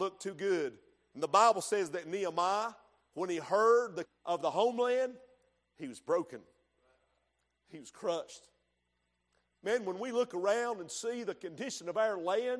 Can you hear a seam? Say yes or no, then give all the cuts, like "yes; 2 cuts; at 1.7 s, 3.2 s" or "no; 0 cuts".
yes; 1 cut; at 4.0 s